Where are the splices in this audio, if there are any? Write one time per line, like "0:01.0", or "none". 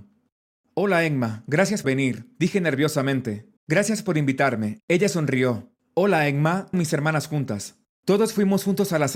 0:01.8
0:03.6
0:06.7

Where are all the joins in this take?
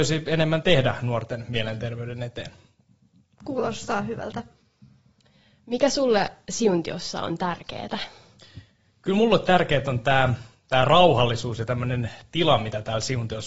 none

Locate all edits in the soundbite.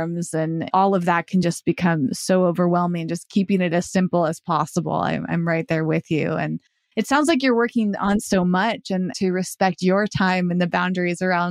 none

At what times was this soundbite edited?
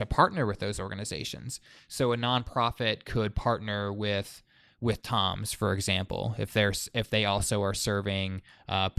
none

